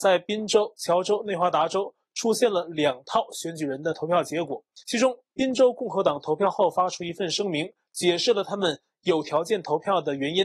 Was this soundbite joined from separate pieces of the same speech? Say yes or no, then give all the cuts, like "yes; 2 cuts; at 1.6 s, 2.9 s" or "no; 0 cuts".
yes; 1 cut; at 4.8 s